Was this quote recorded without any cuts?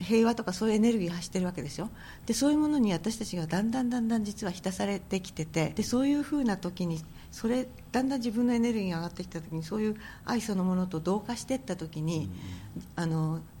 no; 1 cut; at 5.8 s

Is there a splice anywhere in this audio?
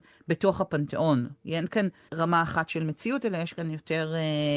yes; 1 cut; at 2.1 s

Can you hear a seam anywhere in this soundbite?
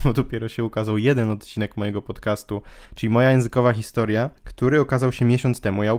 yes; 2 cuts; at 2.8 s, 4.4 s

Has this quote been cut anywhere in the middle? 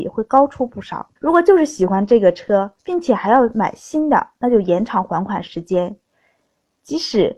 yes; 2 cuts; at 1.2 s, 2.8 s

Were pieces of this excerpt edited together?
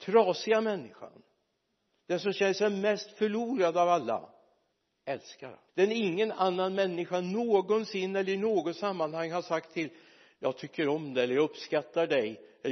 yes; 3 cuts; at 1.7 s, 4.7 s, 5.7 s

